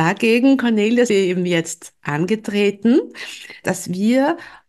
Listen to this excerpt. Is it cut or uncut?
cut